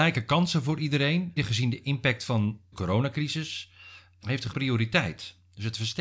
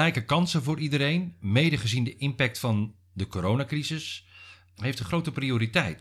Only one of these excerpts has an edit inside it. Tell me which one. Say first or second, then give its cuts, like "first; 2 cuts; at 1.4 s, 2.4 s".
first; 3 cuts; at 1.4 s, 2.7 s, 4.5 s